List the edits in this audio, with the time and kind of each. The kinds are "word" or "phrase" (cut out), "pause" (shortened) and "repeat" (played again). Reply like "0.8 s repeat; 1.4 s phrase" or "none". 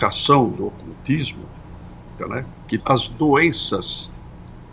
2.2 s phrase; 2.8 s word